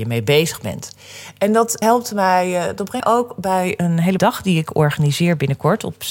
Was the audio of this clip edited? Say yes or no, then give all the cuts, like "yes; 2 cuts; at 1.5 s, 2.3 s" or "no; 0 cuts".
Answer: yes; 3 cuts; at 1.8 s, 3.0 s, 4.2 s